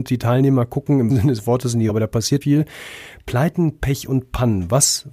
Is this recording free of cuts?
no; 3 cuts; at 1.1 s, 1.9 s, 2.4 s

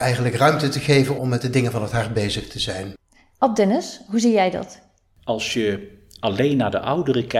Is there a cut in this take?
yes; 2 cuts; at 1.2 s, 6.2 s

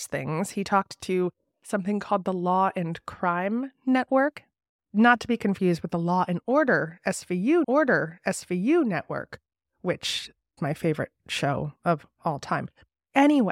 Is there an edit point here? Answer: yes; 3 cuts; at 7.6 s, 10.6 s, 11.8 s

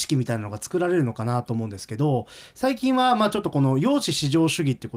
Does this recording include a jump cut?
no; 0 cuts

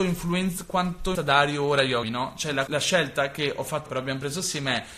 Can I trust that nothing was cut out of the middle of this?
no; 4 cuts; at 1.1 s, 2.0 s, 2.7 s, 3.9 s

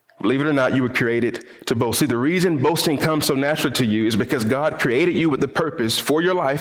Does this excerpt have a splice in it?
no; 0 cuts

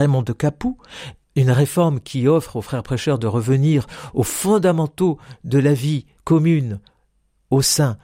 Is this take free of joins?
no; 2 cuts; at 1.2 s, 6.2 s

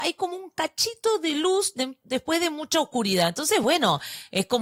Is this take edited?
no; 0 cuts

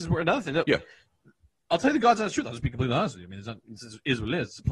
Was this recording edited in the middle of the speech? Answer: no; 0 cuts

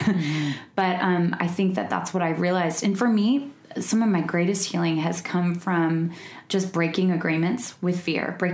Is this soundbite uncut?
yes; 0 cuts

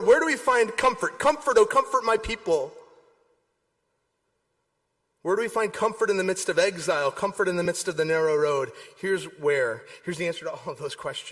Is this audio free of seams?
yes; 0 cuts

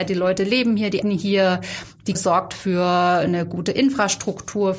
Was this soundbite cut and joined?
yes; 2 cuts; at 1.0 s, 2.2 s

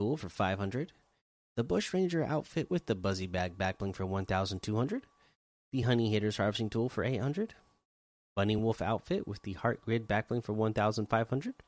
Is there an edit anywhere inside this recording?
no; 0 cuts

